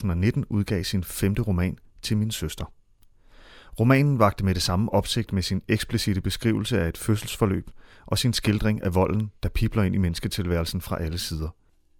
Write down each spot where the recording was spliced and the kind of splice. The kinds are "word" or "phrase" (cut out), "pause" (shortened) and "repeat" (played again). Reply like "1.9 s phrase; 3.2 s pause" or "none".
none